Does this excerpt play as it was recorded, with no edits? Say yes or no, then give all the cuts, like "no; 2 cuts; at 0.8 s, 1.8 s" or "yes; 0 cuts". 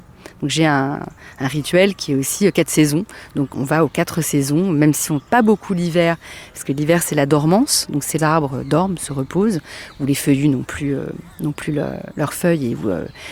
no; 3 cuts; at 3.5 s, 5.2 s, 8.2 s